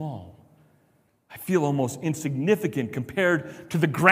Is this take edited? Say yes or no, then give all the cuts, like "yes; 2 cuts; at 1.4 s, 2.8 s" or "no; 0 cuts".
no; 0 cuts